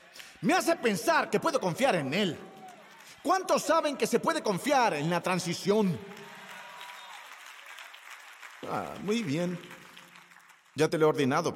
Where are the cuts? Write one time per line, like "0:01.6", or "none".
none